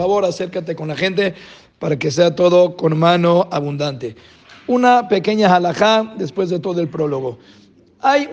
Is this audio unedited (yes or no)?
yes